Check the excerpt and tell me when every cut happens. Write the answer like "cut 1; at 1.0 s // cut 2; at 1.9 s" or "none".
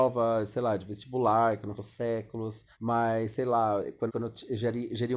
cut 1; at 1.8 s // cut 2; at 2.7 s // cut 3; at 4.1 s